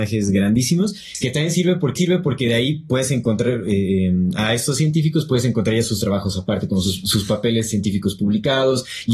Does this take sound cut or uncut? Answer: cut